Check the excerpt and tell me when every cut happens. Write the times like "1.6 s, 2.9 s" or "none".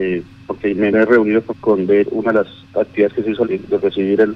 0.9 s, 1.5 s, 2.0 s, 3.4 s